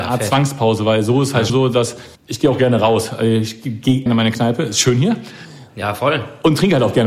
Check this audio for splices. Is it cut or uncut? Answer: cut